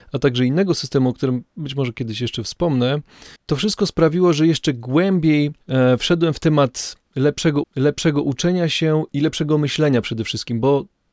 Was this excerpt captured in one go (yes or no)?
no